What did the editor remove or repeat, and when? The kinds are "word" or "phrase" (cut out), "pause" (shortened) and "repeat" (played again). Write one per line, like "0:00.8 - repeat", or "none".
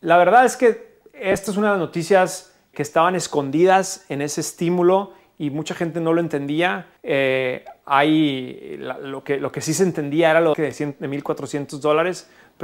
0:02.7 - word
0:07.0 - pause
0:10.5 - phrase